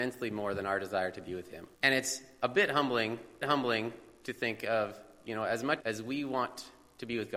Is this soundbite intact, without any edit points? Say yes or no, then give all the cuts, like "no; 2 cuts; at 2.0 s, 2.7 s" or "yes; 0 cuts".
no; 3 cuts; at 1.7 s, 3.4 s, 5.8 s